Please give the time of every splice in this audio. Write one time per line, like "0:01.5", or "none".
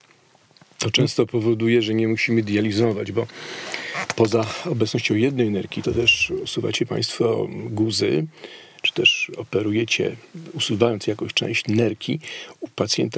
0:05.8